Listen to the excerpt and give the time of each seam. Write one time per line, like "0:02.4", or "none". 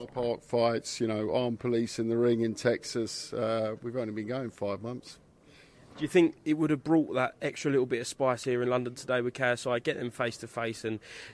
none